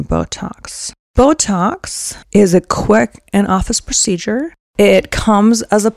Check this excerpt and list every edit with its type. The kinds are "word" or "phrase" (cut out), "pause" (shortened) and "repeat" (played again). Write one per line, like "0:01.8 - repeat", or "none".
0:02.2 - pause